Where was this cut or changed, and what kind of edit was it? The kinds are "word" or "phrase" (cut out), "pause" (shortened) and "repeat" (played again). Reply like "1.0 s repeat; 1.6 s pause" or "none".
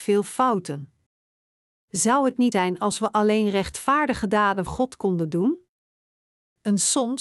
2.5 s word; 4.7 s word

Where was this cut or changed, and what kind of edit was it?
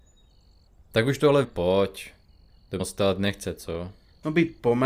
1.4 s word; 2.8 s phrase

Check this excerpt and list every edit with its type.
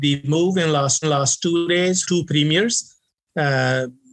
1.0 s repeat; 2.0 s word

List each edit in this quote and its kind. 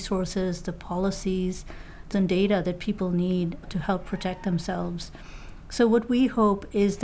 2.1 s word

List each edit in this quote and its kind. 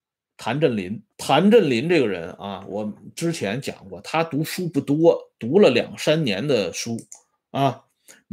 1.1 s pause

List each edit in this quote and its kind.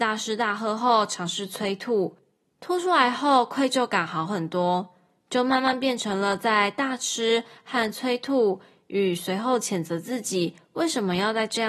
none

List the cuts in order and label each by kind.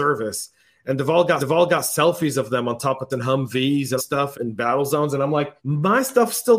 1.4 s repeat; 3.1 s word; 4.0 s phrase; 4.3 s word; 5.6 s pause

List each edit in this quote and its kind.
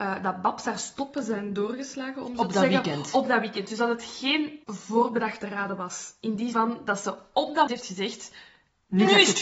4.6 s pause; 6.5 s word; 7.7 s word

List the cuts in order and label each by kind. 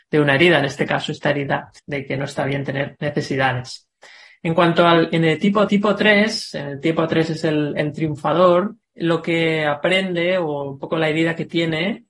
1.8 s pause; 5.7 s repeat; 8.8 s pause

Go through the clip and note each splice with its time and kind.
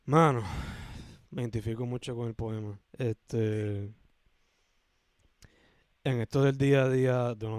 1.2 s pause; 2.8 s pause

